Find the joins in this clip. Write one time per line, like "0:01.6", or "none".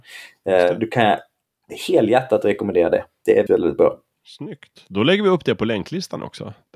0:03.5
0:04.1